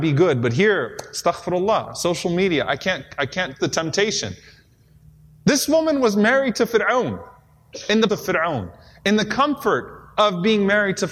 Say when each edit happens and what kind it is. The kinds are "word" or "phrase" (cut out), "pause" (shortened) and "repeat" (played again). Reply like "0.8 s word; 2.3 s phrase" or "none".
3.6 s word; 8.1 s word